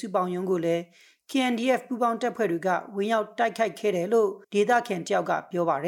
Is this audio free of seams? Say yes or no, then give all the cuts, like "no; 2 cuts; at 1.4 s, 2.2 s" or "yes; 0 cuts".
no; 1 cut; at 4.4 s